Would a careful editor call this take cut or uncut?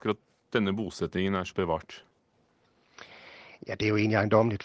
cut